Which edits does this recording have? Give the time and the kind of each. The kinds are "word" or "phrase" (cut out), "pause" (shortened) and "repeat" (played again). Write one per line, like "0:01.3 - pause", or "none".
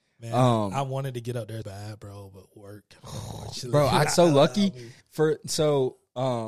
0:01.6 - word
0:04.1 - word
0:05.0 - pause